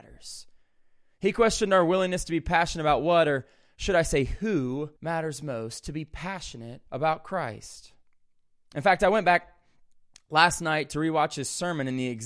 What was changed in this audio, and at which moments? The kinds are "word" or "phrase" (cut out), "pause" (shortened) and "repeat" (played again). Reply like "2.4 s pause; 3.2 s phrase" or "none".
5.0 s pause; 6.9 s pause

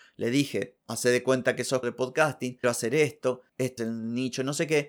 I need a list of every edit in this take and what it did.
1.8 s word; 2.6 s word; 3.8 s word

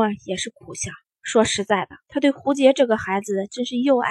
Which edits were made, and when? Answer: 1.0 s pause; 2.0 s pause

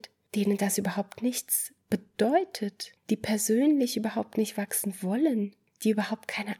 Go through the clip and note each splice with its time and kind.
1.8 s pause

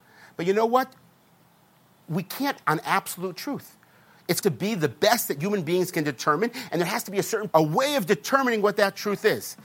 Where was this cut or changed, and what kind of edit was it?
2.6 s word; 4.4 s word; 7.5 s word

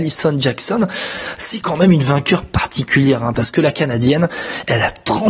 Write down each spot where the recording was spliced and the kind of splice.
none

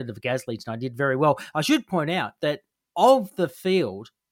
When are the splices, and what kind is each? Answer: none

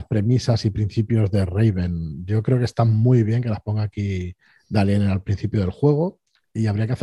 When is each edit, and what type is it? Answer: 4.4 s pause

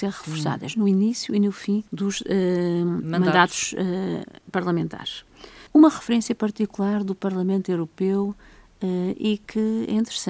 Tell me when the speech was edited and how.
1.9 s pause; 5.7 s pause

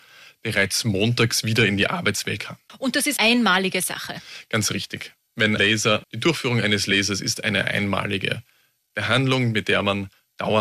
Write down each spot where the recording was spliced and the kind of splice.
2.4 s word; 3.2 s word; 5.6 s word; 6.0 s word

